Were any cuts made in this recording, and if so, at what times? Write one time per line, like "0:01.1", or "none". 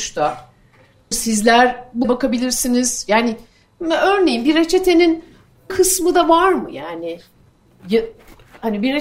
0:01.1
0:02.0
0:05.7